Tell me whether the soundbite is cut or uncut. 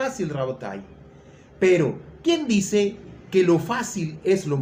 uncut